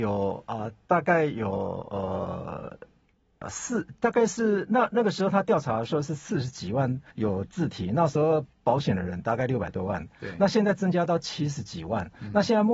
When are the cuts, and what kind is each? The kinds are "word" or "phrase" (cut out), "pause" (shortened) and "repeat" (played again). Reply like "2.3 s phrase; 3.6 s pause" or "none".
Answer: 7.1 s pause